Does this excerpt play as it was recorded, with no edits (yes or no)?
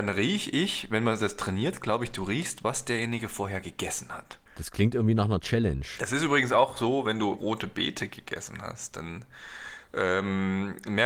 no